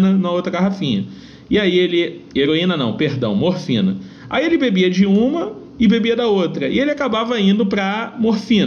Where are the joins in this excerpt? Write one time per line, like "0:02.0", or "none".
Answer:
none